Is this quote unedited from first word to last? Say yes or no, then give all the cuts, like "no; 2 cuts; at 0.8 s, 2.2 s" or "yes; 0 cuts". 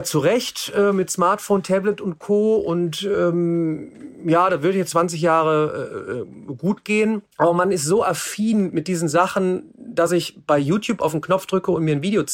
no; 2 cuts; at 4.9 s, 7.3 s